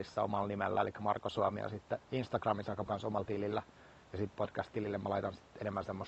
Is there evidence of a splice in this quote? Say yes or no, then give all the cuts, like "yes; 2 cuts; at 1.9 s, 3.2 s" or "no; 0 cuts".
yes; 3 cuts; at 2.0 s, 2.9 s, 4.3 s